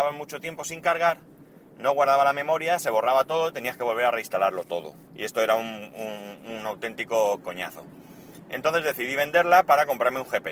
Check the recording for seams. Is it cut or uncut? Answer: cut